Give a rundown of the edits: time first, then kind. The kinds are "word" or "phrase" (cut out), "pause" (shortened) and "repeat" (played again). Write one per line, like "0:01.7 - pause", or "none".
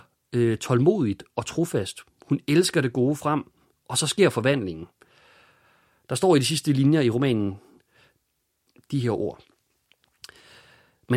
none

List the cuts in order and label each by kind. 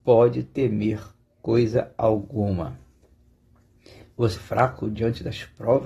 0:04.4 - phrase

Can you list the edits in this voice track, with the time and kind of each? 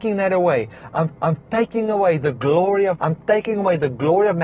0:01.2 - repeat
0:03.0 - word

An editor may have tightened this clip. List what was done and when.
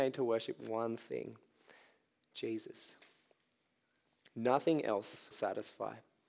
0:05.3 - word

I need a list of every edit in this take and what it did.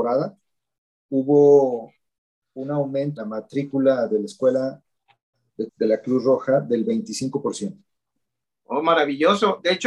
0:03.2 - word
0:05.7 - word

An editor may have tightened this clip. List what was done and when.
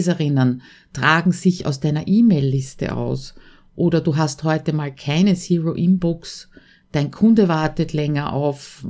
none

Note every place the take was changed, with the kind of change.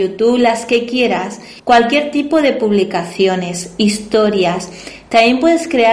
0:01.6 - pause

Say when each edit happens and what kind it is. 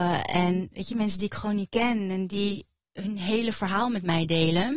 none

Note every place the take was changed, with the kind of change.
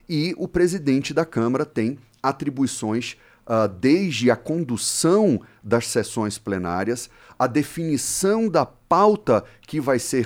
none

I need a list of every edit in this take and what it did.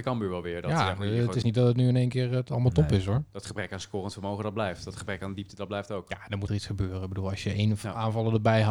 0:01.4 - word
0:06.5 - phrase

